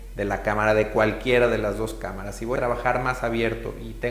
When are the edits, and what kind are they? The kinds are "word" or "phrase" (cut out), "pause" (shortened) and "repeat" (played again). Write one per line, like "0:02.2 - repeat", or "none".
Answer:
0:02.6 - word